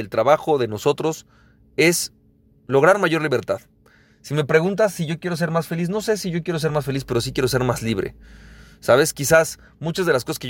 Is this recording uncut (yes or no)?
yes